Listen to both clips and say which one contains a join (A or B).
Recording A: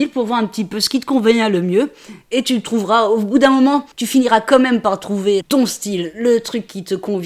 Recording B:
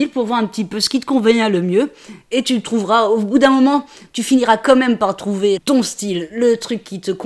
A